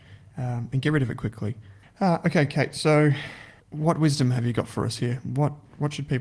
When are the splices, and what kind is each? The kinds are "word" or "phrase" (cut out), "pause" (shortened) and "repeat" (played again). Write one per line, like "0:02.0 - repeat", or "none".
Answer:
0:03.6 - pause